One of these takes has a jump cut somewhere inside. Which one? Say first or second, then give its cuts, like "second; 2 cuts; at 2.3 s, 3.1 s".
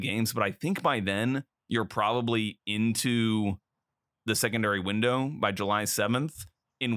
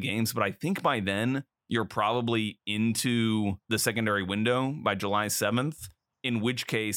second; 1 cut; at 3.6 s